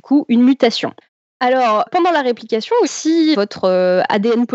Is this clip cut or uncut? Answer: cut